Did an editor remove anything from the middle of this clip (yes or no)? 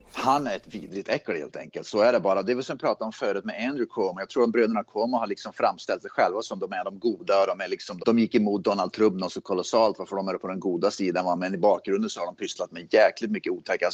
yes